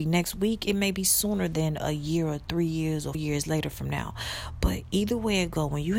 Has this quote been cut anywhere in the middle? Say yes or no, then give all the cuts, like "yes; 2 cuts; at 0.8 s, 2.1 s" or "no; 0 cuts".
yes; 1 cut; at 3.1 s